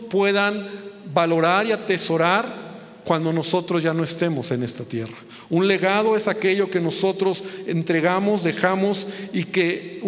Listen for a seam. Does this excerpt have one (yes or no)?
no